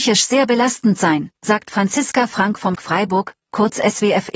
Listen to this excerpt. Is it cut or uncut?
cut